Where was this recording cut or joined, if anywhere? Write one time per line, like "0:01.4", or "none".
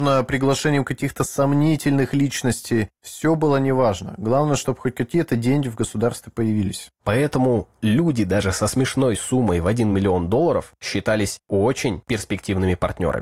none